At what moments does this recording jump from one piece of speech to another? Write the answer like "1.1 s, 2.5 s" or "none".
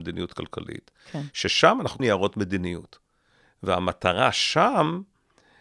2.0 s